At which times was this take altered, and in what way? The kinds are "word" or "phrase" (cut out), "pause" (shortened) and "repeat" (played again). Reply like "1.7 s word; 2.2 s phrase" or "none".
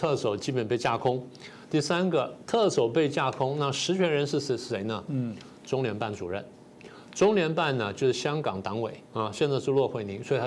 9.0 s pause